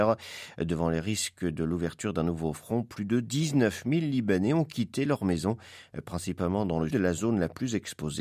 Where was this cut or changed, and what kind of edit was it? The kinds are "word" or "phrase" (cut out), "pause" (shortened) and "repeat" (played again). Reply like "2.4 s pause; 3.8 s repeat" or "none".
6.9 s word